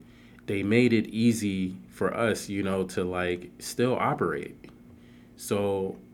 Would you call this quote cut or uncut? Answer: uncut